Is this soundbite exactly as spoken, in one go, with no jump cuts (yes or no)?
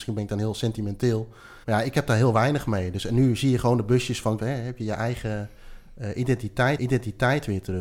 no